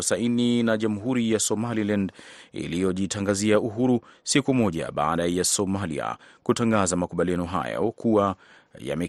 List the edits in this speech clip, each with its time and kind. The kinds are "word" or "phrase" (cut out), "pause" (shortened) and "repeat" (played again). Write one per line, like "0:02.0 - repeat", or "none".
none